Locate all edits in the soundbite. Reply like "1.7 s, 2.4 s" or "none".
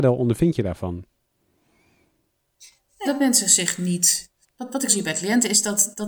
3.0 s, 4.5 s, 4.9 s

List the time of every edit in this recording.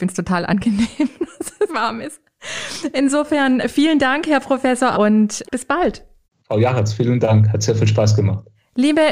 1.7 s, 3.6 s, 4.9 s, 5.4 s, 6.2 s

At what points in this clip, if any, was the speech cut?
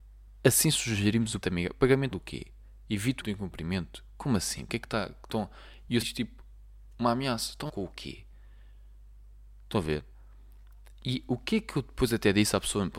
1.4 s, 2.1 s, 3.2 s, 6.0 s, 7.7 s

